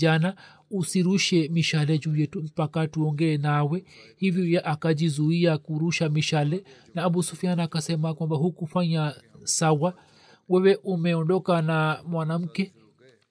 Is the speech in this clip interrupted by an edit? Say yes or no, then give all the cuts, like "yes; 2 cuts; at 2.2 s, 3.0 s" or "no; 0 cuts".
no; 0 cuts